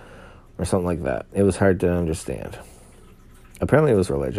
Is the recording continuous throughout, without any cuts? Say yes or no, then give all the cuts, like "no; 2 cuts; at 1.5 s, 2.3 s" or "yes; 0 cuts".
yes; 0 cuts